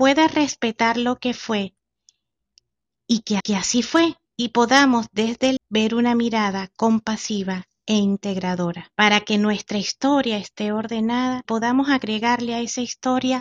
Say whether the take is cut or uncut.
cut